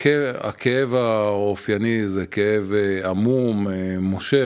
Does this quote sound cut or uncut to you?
uncut